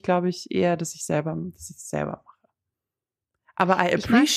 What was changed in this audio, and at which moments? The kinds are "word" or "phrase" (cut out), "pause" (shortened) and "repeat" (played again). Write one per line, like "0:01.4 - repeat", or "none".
none